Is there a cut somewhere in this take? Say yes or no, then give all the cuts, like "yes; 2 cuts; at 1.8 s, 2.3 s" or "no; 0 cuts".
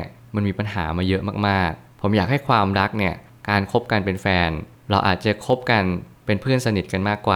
no; 0 cuts